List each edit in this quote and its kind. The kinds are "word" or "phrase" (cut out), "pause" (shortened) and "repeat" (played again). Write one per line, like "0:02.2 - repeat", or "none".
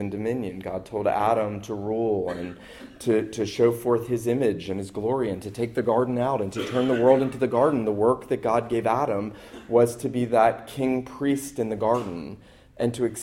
none